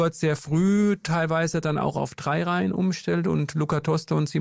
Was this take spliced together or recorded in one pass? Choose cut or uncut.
uncut